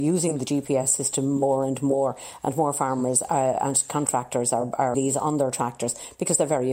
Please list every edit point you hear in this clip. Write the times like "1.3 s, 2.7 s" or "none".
4.9 s